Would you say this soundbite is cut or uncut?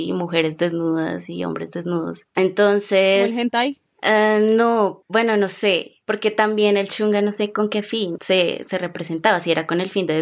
uncut